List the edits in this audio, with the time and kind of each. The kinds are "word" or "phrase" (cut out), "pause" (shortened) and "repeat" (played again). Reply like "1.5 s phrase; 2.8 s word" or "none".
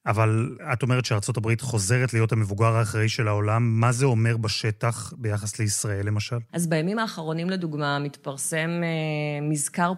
6.5 s pause